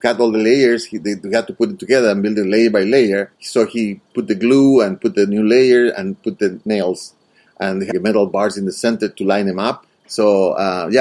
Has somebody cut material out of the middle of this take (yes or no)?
yes